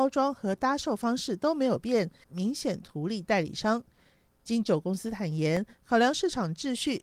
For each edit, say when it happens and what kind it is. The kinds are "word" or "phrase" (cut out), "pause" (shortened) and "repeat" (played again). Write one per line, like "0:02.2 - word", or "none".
0:02.2 - phrase